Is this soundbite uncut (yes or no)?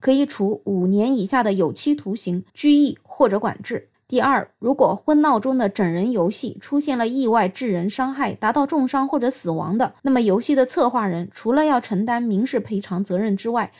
no